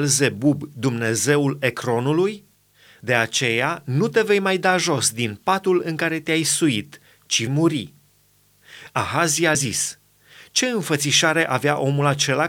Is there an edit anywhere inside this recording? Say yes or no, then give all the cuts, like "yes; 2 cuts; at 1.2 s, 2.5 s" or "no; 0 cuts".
yes; 2 cuts; at 7.5 s, 9.5 s